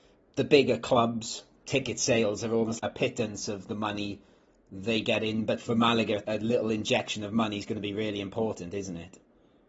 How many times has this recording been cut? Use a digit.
3